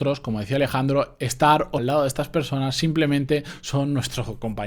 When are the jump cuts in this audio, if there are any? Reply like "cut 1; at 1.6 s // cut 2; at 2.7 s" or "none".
cut 1; at 1.8 s